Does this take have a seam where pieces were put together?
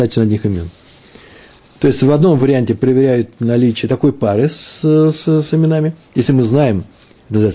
no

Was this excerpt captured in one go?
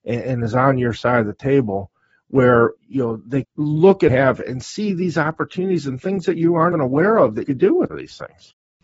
no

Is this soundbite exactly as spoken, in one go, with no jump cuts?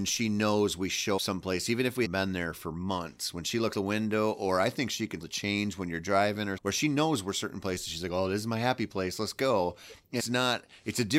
no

